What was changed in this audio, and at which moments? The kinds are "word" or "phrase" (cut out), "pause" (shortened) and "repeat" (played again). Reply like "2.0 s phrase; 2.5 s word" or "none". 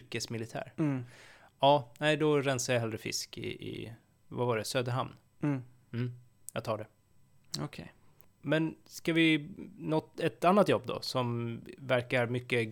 none